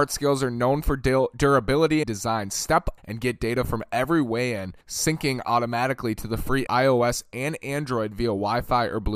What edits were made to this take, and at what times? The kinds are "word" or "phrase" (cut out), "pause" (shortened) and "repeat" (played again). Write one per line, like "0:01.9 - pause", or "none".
0:02.0 - phrase
0:03.0 - word
0:04.8 - pause
0:06.7 - phrase